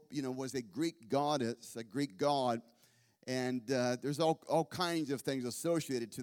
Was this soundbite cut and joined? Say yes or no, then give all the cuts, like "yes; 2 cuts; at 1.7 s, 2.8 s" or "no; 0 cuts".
no; 0 cuts